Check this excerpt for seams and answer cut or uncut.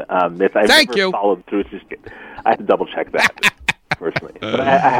cut